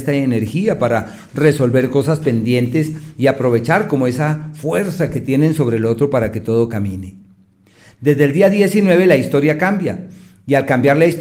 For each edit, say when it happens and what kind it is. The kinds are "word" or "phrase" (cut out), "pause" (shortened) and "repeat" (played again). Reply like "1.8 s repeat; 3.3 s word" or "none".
none